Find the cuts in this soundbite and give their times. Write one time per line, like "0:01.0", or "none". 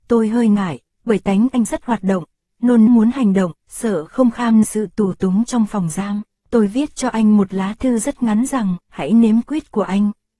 0:01.7
0:02.9
0:03.6
0:04.6
0:06.4
0:08.8
0:09.4